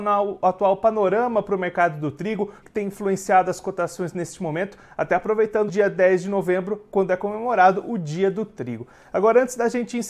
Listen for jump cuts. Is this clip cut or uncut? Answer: cut